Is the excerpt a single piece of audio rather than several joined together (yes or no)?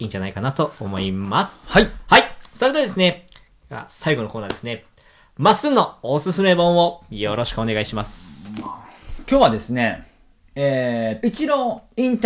no